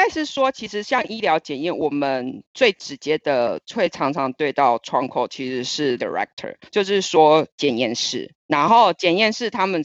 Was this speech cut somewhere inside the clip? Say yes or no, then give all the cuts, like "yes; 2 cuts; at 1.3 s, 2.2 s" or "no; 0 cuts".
yes; 3 cuts; at 6.0 s, 6.7 s, 8.4 s